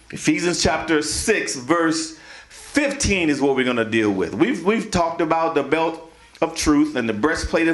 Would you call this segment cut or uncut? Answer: uncut